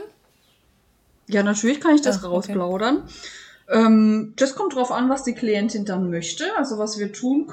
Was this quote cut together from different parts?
no; 0 cuts

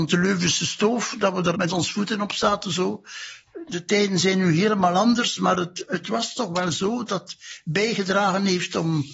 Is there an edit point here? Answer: yes; 2 cuts; at 1.5 s, 7.1 s

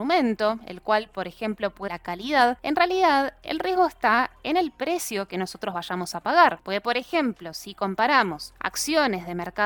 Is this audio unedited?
no; 1 cut; at 1.9 s

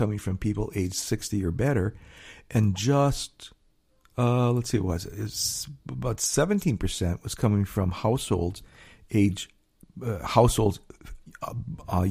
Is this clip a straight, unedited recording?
yes; 0 cuts

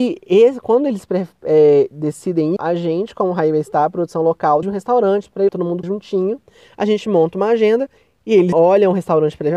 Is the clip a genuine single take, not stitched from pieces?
no; 5 cuts; at 2.6 s, 4.6 s, 5.5 s, 5.8 s, 8.5 s

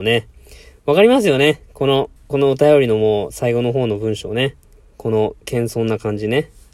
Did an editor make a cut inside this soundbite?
yes; 2 cuts; at 2.2 s, 4.6 s

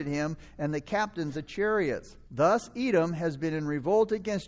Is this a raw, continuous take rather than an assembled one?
no; 2 cuts; at 1.3 s, 2.2 s

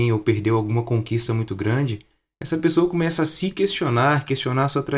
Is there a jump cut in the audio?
no; 0 cuts

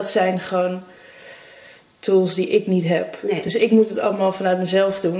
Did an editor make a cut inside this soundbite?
no; 0 cuts

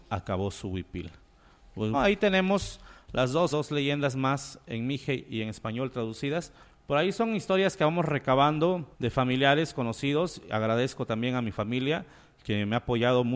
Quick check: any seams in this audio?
yes; 4 cuts; at 1.9 s, 3.5 s, 6.6 s, 8.9 s

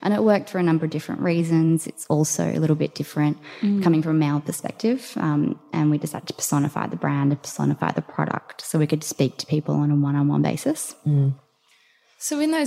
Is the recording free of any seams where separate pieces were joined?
yes; 0 cuts

